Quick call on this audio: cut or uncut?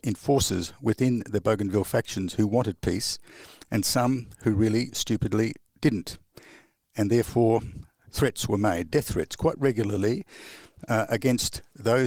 uncut